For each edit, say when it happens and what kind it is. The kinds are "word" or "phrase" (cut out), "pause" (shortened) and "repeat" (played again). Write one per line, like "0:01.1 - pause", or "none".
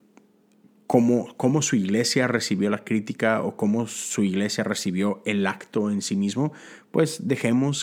none